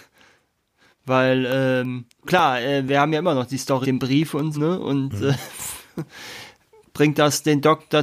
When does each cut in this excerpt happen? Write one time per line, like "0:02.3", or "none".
0:02.2
0:03.8
0:04.5